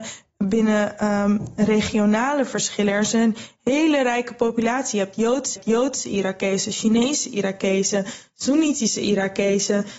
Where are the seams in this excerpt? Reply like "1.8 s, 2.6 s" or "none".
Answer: 5.6 s